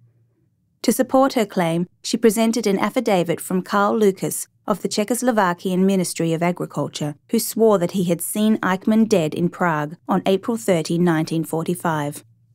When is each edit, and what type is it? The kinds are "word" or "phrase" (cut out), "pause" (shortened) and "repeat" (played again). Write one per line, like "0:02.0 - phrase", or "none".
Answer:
0:07.2 - pause
0:10.0 - pause

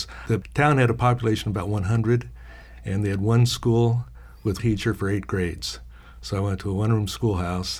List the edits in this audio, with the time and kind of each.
0:04.6 - word

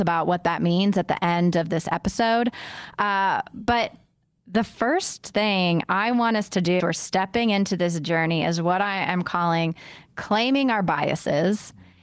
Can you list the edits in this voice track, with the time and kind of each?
0:06.8 - word

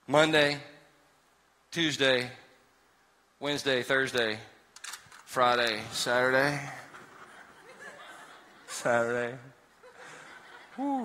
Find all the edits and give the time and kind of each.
none

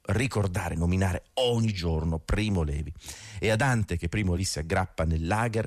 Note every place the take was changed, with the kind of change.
0:04.4 - word

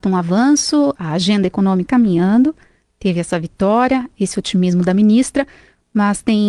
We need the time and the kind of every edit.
0:00.9 - word
0:01.9 - word

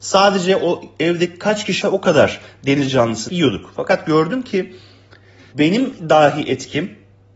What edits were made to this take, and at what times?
0:01.8 - word
0:03.3 - word
0:05.5 - word

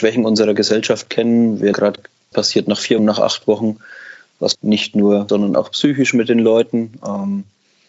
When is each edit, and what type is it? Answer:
0:01.7 - word
0:02.3 - phrase
0:03.0 - word
0:04.5 - word
0:05.3 - word

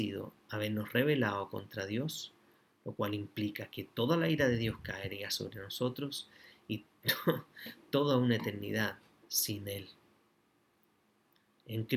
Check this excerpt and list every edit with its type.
none

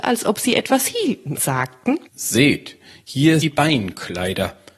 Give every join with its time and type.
0:01.4 - word
0:02.1 - pause
0:03.4 - word

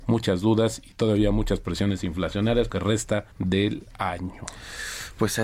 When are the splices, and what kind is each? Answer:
0:02.7 - phrase
0:03.3 - pause

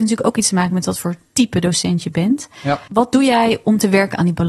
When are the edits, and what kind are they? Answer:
0:02.9 - pause

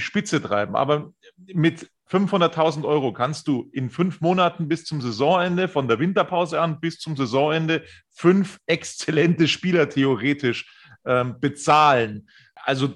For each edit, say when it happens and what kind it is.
none

